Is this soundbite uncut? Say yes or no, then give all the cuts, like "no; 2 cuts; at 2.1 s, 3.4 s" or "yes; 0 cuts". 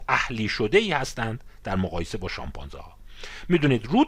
yes; 0 cuts